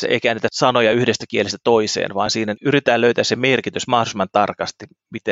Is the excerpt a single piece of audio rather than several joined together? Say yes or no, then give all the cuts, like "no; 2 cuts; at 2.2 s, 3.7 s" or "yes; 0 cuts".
yes; 0 cuts